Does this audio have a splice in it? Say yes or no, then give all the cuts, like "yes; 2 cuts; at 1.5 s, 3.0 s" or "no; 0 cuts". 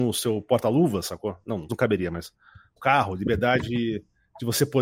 yes; 2 cuts; at 1.7 s, 2.8 s